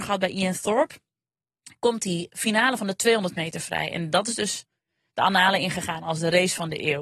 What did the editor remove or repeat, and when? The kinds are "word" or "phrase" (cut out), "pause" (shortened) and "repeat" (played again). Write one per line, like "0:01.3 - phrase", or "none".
none